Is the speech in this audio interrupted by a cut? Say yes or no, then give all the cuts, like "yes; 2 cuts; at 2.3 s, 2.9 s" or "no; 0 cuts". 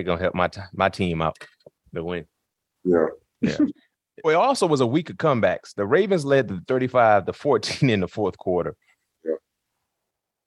yes; 2 cuts; at 4.2 s, 6.7 s